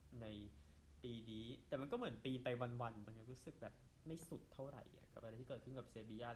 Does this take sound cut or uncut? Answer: cut